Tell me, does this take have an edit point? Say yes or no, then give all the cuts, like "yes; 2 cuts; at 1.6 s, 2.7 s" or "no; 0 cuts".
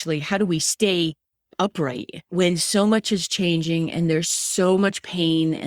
no; 0 cuts